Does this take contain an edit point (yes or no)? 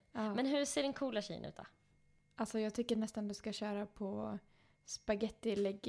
no